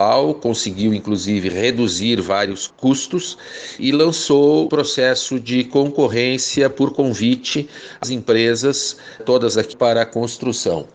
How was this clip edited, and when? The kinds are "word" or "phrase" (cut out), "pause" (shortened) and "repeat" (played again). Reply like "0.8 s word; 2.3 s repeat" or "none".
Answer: 2.7 s word; 3.8 s word; 4.7 s word; 8.0 s word; 9.2 s word; 9.7 s phrase